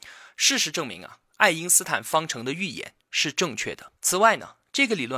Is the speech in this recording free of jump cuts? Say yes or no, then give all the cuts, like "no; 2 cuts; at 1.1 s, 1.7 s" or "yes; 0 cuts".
no; 1 cut; at 4.0 s